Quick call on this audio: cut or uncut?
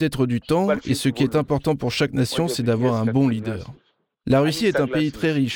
uncut